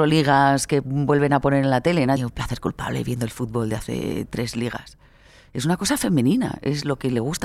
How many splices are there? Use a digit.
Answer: 1